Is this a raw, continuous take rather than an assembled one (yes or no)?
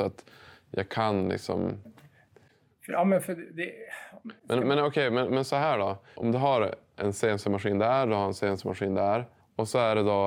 yes